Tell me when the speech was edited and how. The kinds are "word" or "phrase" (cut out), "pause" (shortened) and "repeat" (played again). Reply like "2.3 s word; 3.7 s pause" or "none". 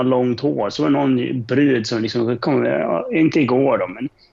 none